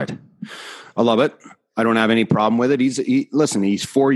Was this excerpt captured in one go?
yes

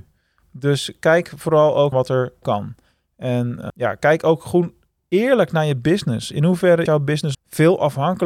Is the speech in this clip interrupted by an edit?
yes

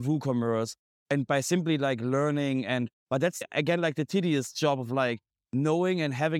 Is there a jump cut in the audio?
no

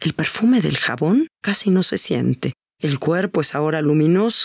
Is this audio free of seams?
no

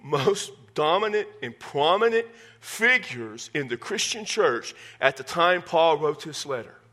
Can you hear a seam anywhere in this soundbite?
no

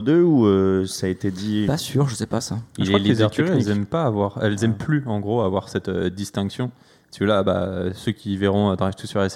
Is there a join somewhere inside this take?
no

